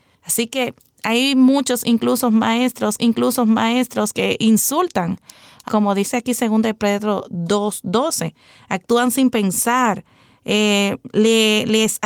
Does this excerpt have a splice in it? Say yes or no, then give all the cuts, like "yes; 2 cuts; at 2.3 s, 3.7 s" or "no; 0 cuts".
yes; 2 cuts; at 3.0 s, 5.7 s